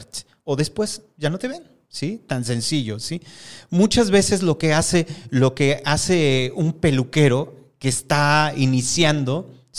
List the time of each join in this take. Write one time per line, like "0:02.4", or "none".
none